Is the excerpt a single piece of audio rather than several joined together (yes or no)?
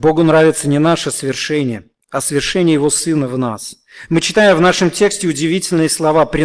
no